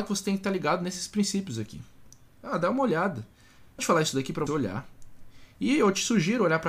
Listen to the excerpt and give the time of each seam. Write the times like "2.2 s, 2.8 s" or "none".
3.8 s, 4.5 s